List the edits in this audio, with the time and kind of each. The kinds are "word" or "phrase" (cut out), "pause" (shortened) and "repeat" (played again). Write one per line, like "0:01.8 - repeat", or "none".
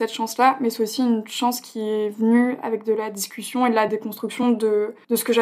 none

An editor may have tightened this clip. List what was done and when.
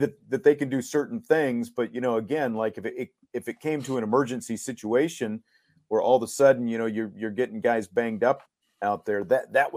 none

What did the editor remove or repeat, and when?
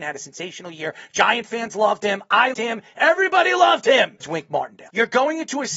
0:02.5 - word
0:04.2 - word

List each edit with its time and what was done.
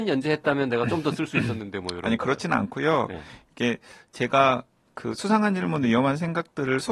none

